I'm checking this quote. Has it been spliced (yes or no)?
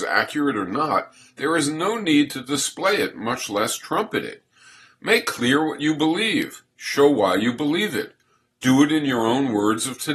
no